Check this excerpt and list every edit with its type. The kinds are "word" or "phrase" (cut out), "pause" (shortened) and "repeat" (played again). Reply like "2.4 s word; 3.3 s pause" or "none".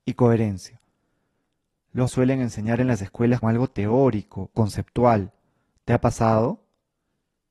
2.1 s phrase; 3.4 s word; 4.5 s word